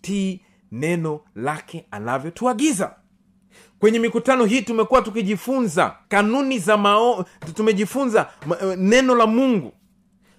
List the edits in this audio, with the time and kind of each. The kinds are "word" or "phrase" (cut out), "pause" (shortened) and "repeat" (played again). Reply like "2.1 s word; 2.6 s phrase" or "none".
6.0 s pause